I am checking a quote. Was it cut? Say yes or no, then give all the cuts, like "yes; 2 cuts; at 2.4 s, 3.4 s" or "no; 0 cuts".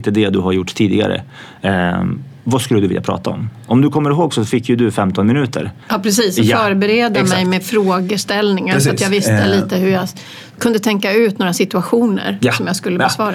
yes; 1 cut; at 5.8 s